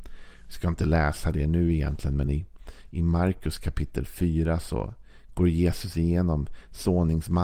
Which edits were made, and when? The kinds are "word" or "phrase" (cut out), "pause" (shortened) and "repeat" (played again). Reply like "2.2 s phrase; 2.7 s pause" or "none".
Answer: none